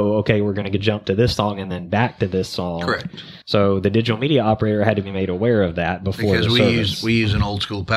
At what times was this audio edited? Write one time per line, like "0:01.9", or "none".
0:03.4